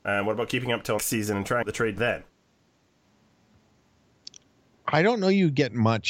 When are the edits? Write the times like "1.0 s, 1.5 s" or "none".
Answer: 1.0 s, 1.6 s, 2.0 s